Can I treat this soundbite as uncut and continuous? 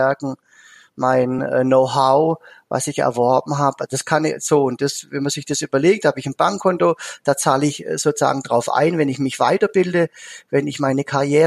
yes; 0 cuts

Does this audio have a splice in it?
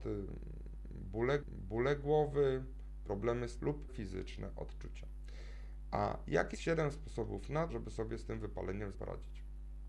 yes; 6 cuts; at 1.4 s, 3.6 s, 3.9 s, 6.5 s, 7.7 s, 8.9 s

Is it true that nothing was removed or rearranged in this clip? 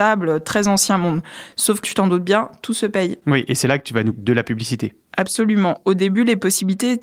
no; 2 cuts; at 1.8 s, 4.1 s

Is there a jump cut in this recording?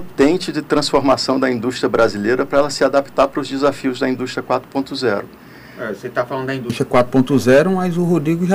no; 0 cuts

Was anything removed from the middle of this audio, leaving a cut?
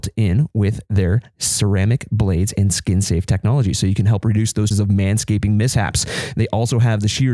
yes; 1 cut; at 4.7 s

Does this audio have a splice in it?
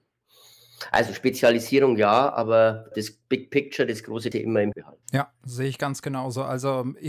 yes; 4 cuts; at 2.9 s, 4.3 s, 4.7 s, 5.0 s

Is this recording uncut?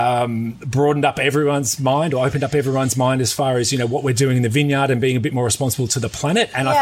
yes; 0 cuts

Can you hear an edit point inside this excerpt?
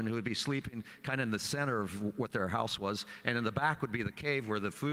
no; 0 cuts

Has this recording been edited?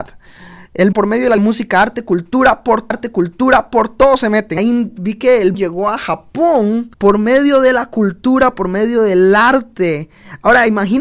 yes; 6 cuts; at 0.9 s, 1.4 s, 2.9 s, 4.6 s, 5.5 s, 6.9 s

